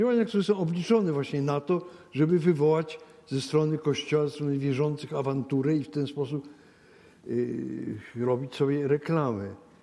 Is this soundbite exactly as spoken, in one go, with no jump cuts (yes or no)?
yes